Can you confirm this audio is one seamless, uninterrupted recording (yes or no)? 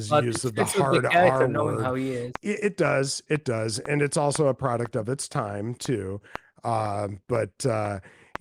yes